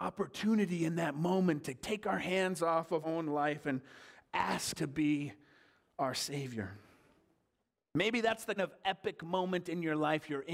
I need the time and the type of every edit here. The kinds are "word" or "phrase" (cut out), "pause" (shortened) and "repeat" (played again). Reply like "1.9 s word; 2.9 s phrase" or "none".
3.0 s word; 4.8 s word; 8.6 s word